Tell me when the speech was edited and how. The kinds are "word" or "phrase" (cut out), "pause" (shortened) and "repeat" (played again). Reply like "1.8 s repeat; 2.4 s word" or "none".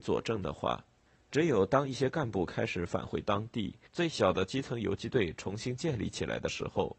1.1 s pause; 3.9 s pause